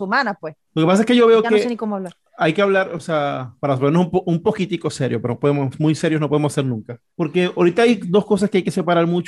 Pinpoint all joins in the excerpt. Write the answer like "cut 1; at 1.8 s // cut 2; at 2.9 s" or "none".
cut 1; at 3.6 s